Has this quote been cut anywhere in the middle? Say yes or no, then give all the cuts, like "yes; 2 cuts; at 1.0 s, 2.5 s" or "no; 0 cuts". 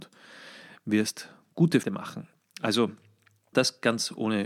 yes; 2 cuts; at 1.8 s, 3.5 s